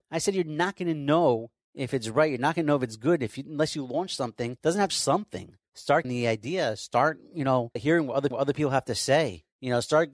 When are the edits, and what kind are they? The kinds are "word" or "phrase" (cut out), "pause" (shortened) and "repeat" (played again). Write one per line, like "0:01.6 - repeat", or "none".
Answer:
0:04.9 - phrase
0:06.0 - phrase
0:07.8 - word
0:08.3 - repeat

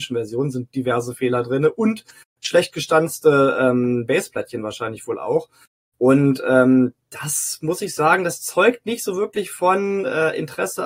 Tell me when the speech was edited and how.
none

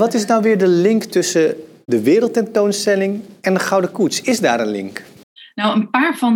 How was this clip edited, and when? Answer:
none

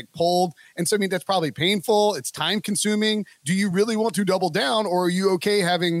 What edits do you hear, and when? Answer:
none

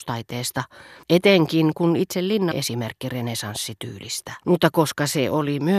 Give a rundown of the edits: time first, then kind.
0:01.0 - pause
0:02.5 - phrase
0:04.4 - pause

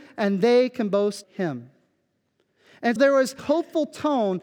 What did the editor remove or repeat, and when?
0:01.2 - word
0:03.0 - word
0:03.4 - word

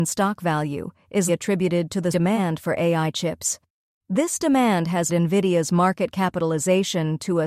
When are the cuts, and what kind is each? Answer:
0:01.3 - word
0:02.1 - word
0:05.1 - phrase

